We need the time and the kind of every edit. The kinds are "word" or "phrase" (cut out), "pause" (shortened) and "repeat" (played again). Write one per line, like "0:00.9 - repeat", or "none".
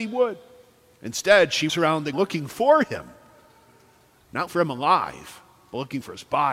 0:01.7 - word
0:02.1 - word
0:04.5 - word